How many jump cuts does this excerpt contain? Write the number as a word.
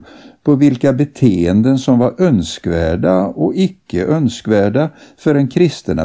zero